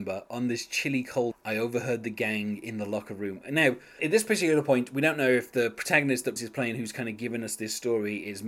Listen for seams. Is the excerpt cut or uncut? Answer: cut